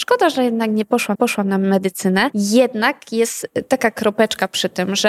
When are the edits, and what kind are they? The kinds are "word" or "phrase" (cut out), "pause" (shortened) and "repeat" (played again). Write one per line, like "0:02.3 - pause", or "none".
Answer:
0:01.1 - repeat

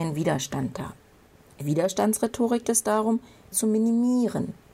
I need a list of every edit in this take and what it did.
0:01.6 - word
0:02.6 - word
0:03.5 - word

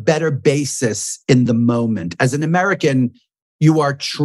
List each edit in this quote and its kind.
none

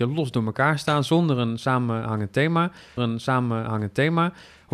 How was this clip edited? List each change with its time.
0:03.0 - repeat

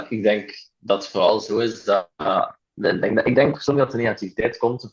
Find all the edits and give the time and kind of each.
none

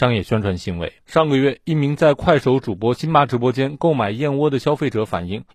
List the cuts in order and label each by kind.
0:01.0 - pause

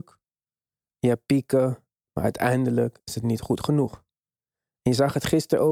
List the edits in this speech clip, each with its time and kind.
none

